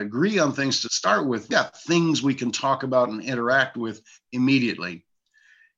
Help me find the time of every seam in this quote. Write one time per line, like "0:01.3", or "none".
0:01.5